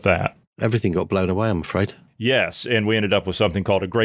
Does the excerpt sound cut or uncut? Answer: uncut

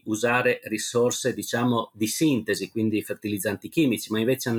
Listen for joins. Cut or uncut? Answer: uncut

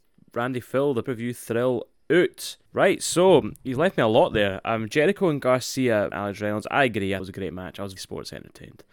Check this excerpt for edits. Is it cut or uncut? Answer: cut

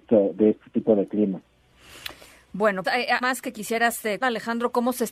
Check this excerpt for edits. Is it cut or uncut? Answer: cut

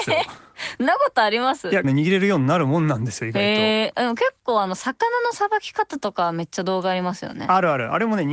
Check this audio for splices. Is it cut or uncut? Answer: cut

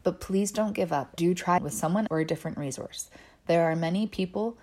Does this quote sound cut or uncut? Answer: cut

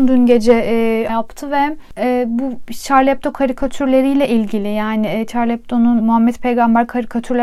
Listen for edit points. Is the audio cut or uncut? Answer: cut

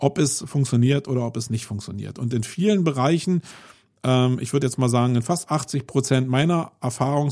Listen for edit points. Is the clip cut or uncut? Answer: uncut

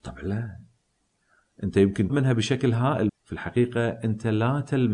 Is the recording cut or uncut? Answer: cut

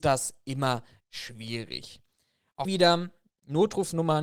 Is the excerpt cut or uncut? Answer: cut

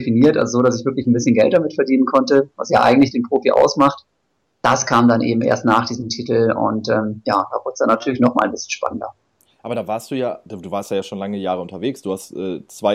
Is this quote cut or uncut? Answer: uncut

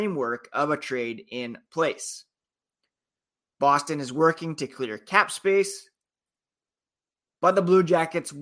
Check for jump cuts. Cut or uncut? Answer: uncut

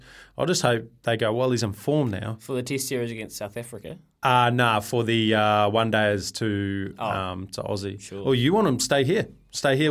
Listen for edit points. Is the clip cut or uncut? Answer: uncut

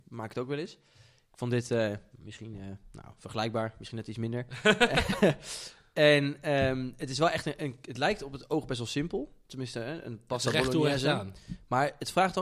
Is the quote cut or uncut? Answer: uncut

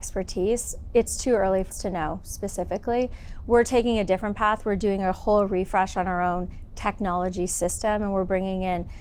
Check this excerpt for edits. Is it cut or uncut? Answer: cut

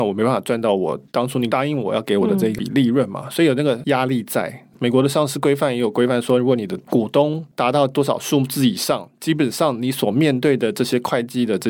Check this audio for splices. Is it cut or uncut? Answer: cut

